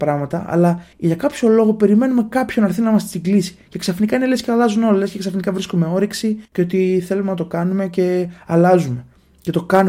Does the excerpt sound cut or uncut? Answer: cut